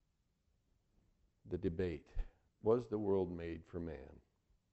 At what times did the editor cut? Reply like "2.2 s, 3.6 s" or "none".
2.5 s